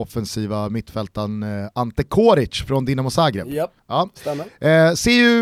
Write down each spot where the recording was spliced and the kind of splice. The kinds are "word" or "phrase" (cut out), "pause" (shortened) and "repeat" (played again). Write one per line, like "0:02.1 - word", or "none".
0:03.8 - pause

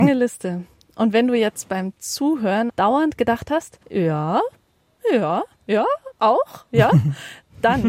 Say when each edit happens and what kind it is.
0:03.8 - pause

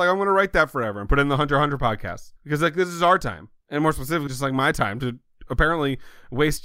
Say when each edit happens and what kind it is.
0:02.4 - pause
0:03.6 - pause
0:04.3 - word

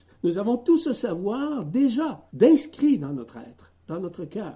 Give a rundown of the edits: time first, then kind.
0:02.3 - pause

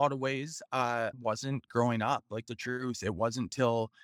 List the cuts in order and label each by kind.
0:01.1 - word
0:01.7 - word
0:02.5 - word

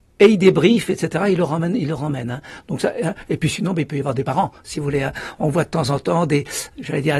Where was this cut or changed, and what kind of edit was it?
none

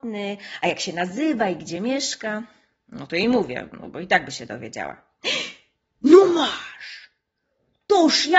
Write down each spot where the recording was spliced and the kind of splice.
none

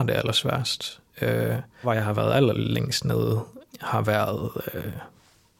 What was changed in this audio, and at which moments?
0:01.8 - word
0:03.7 - word

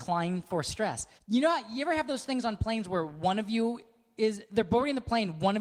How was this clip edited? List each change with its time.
0:01.2 - pause

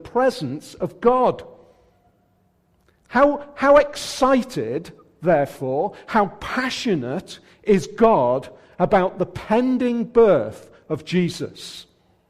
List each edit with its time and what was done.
none

